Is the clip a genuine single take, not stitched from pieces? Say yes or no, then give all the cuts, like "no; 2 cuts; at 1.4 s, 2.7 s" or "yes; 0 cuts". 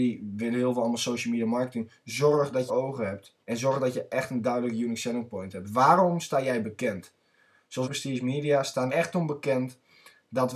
no; 4 cuts; at 2.7 s, 3.4 s, 7.8 s, 8.9 s